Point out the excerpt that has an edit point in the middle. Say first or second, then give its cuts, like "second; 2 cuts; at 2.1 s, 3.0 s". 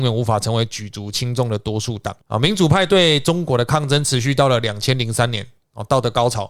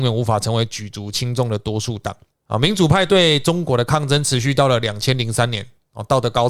first; 1 cut; at 2.2 s